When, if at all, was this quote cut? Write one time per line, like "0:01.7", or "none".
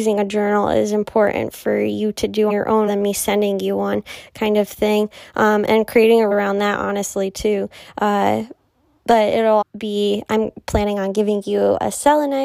0:02.5
0:02.9
0:06.3
0:09.6